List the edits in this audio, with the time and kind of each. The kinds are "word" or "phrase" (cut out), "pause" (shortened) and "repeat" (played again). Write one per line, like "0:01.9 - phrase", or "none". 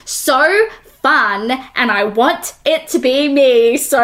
none